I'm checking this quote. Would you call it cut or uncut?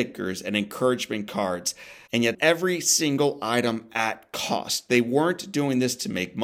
cut